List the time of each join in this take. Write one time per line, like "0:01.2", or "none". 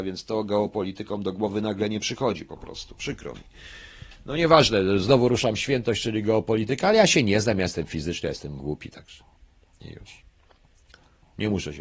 none